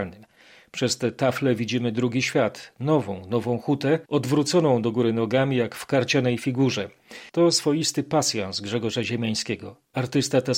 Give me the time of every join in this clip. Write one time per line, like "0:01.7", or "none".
0:04.1
0:07.3